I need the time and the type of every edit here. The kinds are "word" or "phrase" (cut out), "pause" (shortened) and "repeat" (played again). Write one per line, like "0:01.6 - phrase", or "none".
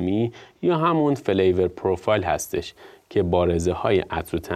none